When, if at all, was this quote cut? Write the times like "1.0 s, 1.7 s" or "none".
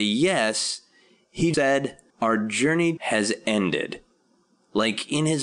1.5 s, 2.1 s, 3.0 s